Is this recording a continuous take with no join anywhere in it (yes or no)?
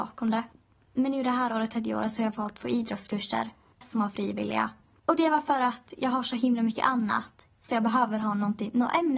yes